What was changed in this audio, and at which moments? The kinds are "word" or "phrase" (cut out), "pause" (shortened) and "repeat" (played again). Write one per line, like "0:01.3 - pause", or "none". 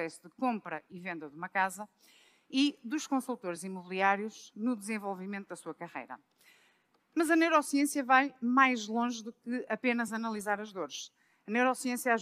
none